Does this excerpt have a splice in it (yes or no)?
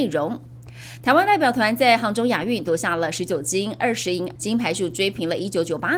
yes